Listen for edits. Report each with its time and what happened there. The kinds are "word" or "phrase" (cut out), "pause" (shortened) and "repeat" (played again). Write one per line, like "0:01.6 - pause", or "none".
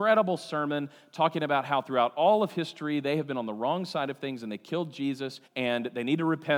0:05.4 - pause